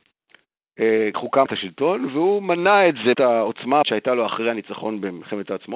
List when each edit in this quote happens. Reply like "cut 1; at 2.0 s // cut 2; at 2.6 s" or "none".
cut 1; at 1.1 s // cut 2; at 1.5 s // cut 3; at 3.1 s // cut 4; at 3.8 s

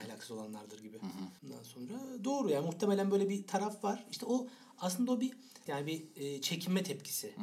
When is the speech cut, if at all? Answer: cut 1; at 1.4 s // cut 2; at 5.7 s

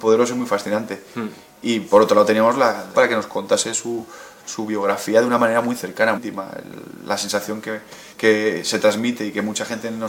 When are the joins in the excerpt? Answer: cut 1; at 2.9 s // cut 2; at 6.2 s // cut 3; at 8.1 s

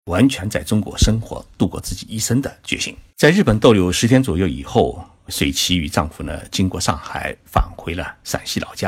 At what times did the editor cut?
cut 1; at 3.1 s

